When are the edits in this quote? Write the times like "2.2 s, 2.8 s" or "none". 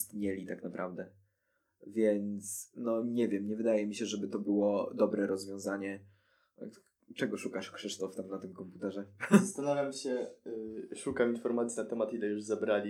none